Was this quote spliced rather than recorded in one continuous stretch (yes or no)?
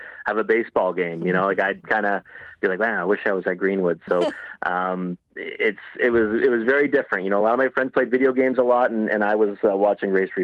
no